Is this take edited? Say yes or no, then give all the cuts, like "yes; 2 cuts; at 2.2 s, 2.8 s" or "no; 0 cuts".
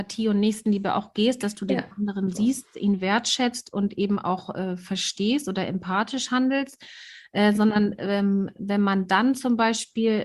no; 0 cuts